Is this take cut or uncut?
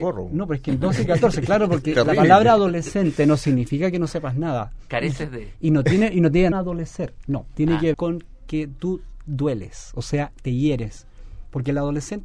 cut